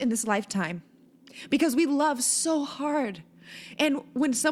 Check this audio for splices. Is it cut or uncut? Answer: uncut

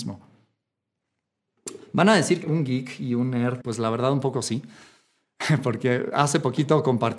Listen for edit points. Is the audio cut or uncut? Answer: cut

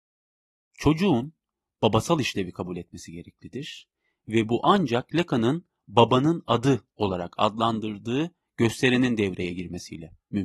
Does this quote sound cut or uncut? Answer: uncut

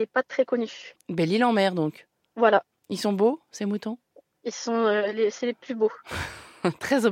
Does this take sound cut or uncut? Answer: uncut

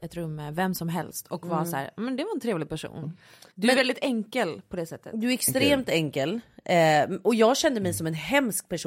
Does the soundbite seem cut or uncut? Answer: cut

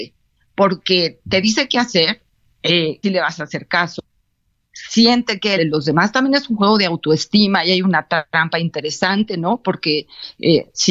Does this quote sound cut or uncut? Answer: cut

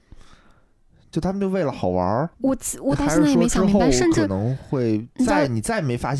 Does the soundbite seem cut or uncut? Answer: cut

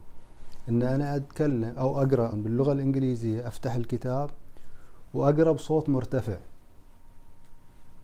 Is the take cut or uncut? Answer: cut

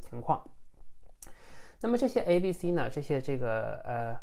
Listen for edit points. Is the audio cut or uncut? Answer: uncut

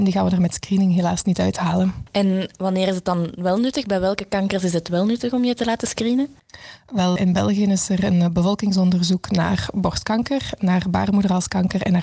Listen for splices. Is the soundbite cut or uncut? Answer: cut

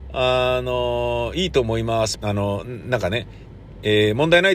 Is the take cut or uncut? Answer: cut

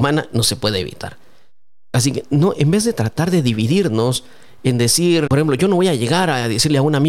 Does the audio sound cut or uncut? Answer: cut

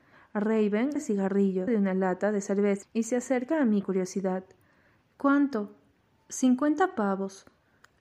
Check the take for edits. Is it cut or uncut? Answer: cut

